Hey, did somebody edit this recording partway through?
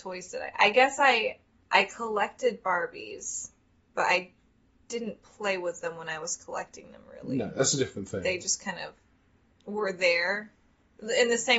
no; 0 cuts

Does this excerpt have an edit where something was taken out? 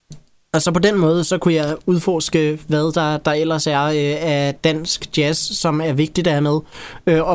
no; 0 cuts

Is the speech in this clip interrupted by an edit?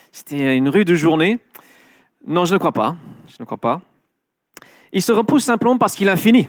no; 0 cuts

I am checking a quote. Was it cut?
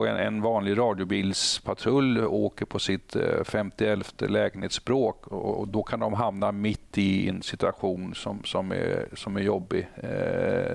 no; 0 cuts

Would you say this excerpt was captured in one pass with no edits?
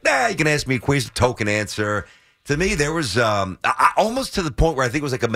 yes; 0 cuts

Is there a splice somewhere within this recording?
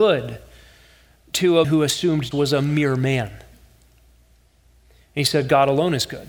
yes; 2 cuts; at 1.6 s, 2.3 s

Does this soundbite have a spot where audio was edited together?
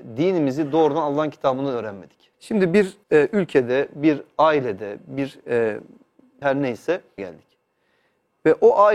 yes; 4 cuts; at 2.3 s, 3.0 s, 6.4 s, 7.2 s

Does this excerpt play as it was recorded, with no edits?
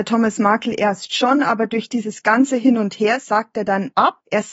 yes; 0 cuts

